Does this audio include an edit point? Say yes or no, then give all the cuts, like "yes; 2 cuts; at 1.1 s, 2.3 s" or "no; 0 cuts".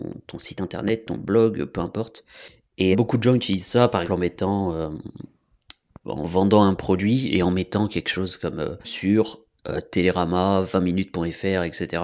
yes; 4 cuts; at 2.9 s, 4.0 s, 6.0 s, 8.8 s